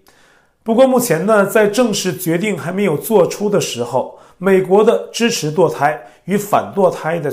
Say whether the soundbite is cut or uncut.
uncut